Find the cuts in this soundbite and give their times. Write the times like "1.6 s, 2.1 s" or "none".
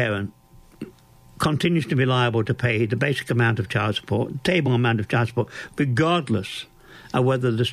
none